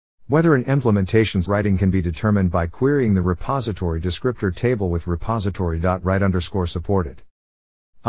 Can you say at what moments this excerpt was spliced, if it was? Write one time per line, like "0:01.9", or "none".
0:01.4